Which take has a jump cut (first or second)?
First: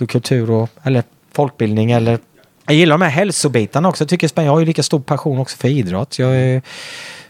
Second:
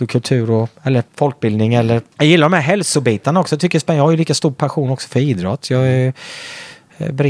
second